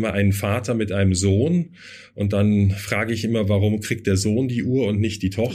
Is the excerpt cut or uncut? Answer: uncut